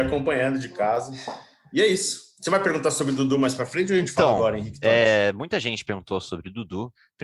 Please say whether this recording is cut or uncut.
uncut